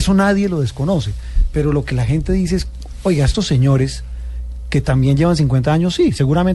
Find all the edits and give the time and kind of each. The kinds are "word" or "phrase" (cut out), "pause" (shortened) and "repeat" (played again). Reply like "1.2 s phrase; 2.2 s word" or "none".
none

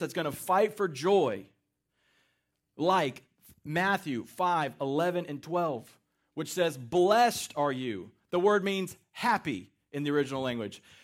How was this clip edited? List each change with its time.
none

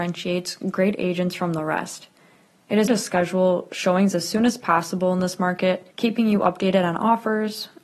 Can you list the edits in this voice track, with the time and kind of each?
2.9 s word; 5.9 s pause

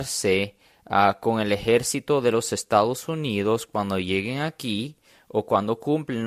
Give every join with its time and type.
none

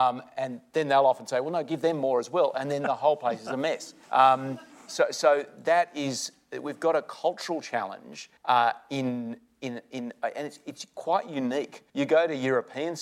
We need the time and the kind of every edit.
4.0 s pause; 8.4 s pause; 11.9 s pause

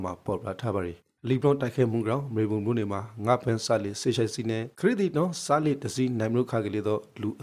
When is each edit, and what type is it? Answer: 4.7 s pause

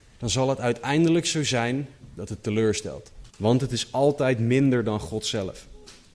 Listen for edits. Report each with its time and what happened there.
3.3 s pause

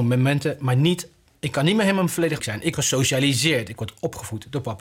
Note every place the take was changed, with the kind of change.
2.4 s word; 2.7 s word

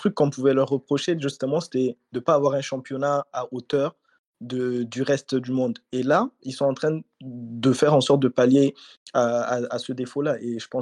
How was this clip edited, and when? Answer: none

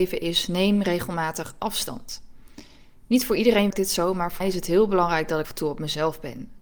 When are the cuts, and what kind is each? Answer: 3.7 s word; 4.4 s word; 5.4 s word

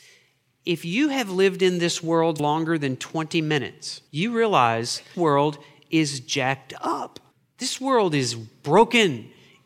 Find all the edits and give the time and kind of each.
2.4 s word; 4.1 s pause; 5.1 s word; 7.3 s pause

